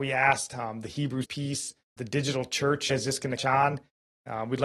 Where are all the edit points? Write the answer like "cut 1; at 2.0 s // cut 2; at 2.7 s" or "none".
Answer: cut 1; at 1.2 s // cut 2; at 2.0 s // cut 3; at 2.9 s // cut 4; at 3.4 s